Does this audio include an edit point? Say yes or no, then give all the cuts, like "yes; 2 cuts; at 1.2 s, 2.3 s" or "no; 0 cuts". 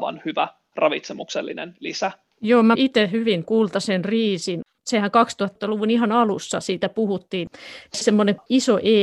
yes; 4 cuts; at 2.3 s, 2.7 s, 3.4 s, 8.0 s